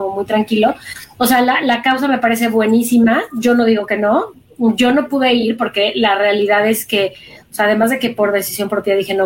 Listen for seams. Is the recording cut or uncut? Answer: uncut